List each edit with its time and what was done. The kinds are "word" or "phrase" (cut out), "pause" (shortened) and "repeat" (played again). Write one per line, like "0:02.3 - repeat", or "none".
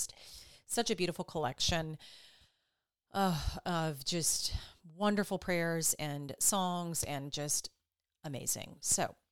none

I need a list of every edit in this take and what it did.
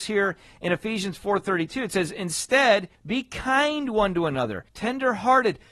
0:02.9 - pause
0:04.7 - pause

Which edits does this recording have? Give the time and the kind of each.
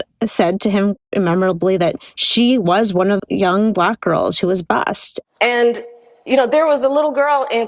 0:01.1 - word
0:03.2 - word

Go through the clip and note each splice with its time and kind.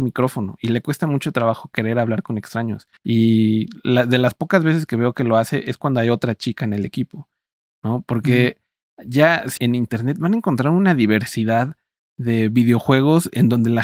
0:03.0 - pause
0:09.6 - phrase

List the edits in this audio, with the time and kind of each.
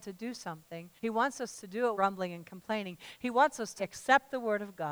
0:01.0 - pause
0:01.9 - word
0:03.8 - word

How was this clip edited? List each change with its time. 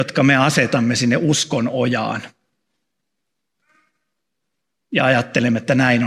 none

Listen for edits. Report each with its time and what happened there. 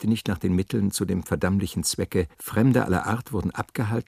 0:02.3 - pause

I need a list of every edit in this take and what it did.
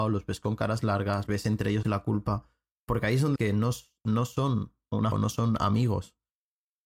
0:01.3 - word
0:01.8 - word
0:03.4 - word
0:05.1 - word

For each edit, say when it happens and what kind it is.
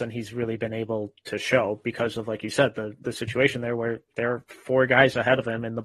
none

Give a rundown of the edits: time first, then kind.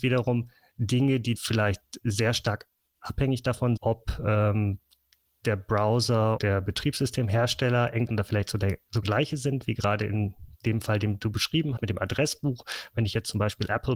0:01.4 - word
0:03.8 - word
0:06.4 - word
0:08.1 - word
0:09.0 - word
0:11.8 - word

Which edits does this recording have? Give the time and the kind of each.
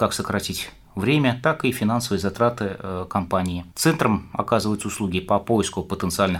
0:03.7 - pause

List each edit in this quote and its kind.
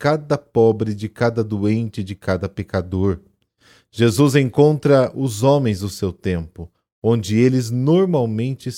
none

